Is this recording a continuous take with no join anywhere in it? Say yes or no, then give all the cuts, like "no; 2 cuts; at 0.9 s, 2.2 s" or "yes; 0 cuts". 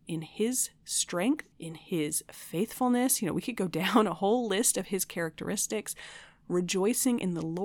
no; 1 cut; at 1.5 s